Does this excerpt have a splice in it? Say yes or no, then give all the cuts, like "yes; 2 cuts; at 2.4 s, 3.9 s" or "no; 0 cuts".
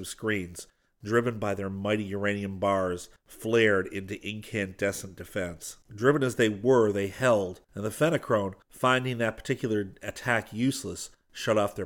yes; 4 cuts; at 3.2 s, 5.8 s, 7.6 s, 8.6 s